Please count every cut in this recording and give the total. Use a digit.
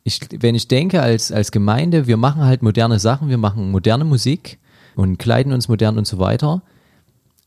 1